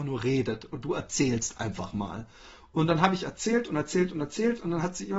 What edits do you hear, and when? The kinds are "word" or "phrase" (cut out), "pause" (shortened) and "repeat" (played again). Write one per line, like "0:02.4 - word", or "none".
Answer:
none